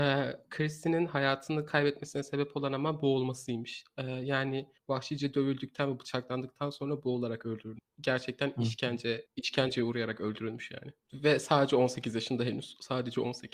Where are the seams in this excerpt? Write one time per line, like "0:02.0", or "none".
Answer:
0:04.8
0:09.3
0:11.0